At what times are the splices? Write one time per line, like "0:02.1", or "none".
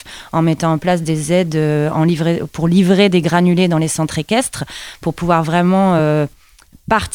none

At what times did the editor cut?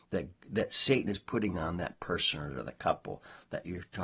none

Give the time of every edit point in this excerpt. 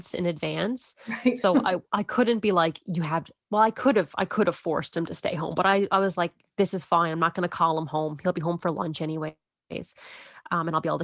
none

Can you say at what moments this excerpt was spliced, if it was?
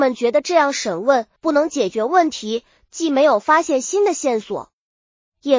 0:01.4

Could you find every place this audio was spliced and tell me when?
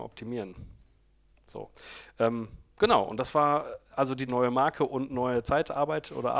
0:01.3
0:04.3

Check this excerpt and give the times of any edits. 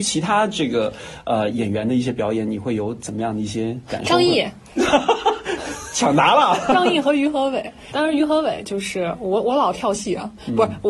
0:07.9

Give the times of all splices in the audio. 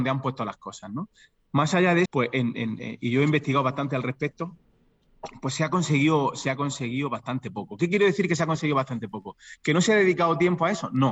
0:02.0

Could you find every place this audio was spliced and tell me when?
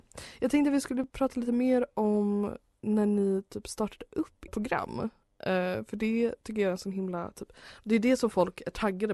0:04.5

